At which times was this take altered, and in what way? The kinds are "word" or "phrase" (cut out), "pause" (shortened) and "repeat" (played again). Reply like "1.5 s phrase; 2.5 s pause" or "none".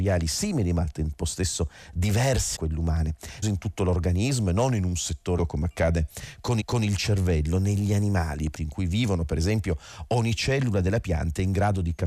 2.6 s word; 3.4 s word; 5.4 s word; 6.6 s repeat; 8.5 s phrase